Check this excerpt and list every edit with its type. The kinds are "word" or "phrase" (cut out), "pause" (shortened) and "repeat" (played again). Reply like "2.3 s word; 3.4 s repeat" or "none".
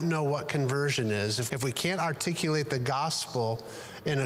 1.5 s word